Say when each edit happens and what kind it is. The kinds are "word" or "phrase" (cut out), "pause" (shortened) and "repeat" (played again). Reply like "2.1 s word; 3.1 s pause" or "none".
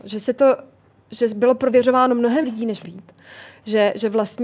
2.4 s word; 2.8 s word

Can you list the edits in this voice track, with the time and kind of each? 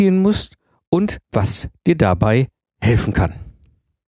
none

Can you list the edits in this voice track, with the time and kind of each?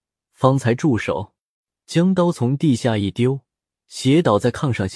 none

